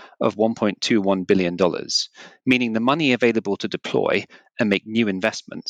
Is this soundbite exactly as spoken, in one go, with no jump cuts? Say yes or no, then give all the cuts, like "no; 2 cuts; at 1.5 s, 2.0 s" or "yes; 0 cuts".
yes; 0 cuts